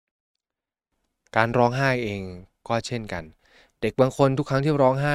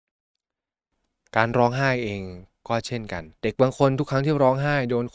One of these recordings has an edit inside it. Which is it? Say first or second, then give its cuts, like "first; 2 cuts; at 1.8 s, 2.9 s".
second; 1 cut; at 3.4 s